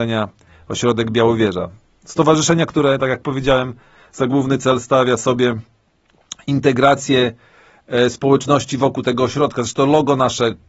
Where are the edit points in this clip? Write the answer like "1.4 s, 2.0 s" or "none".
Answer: none